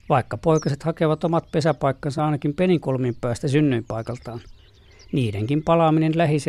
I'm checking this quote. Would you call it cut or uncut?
uncut